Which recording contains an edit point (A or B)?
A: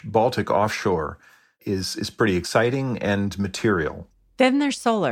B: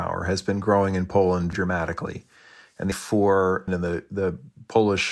B